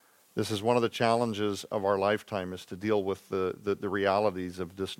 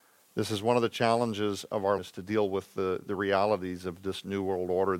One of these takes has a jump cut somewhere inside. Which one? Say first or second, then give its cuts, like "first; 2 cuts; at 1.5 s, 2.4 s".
second; 2 cuts; at 2.0 s, 3.0 s